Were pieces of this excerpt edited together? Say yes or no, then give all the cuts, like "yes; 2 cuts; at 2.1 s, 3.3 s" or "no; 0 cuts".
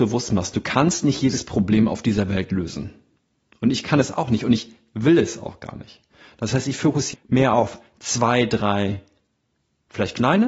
yes; 1 cut; at 7.1 s